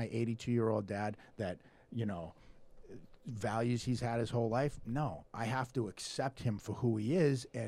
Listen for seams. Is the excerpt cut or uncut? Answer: uncut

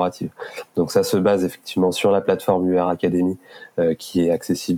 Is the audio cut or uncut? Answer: uncut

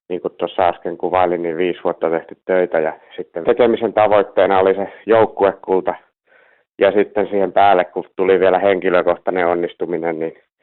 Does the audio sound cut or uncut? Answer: cut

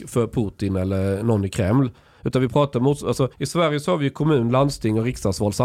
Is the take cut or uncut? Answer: cut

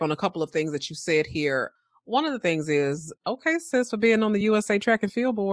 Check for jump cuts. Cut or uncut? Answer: uncut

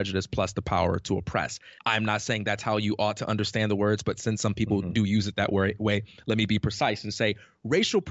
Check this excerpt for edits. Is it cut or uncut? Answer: cut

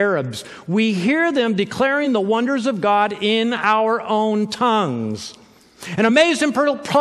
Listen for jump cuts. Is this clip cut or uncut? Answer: uncut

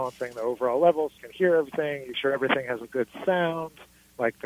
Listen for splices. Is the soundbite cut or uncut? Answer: cut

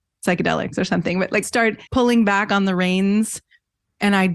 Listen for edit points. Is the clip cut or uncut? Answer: cut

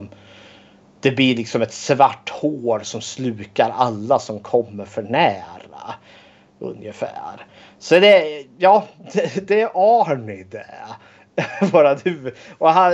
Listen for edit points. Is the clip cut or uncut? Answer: uncut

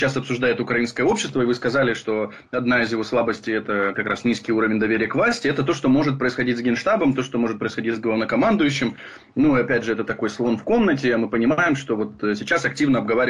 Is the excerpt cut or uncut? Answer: uncut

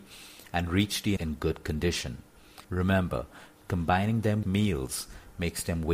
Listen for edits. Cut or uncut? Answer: cut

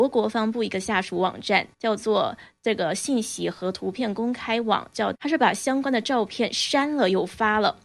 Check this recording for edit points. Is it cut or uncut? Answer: cut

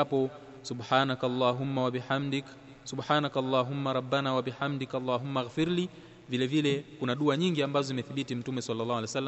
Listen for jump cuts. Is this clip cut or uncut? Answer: uncut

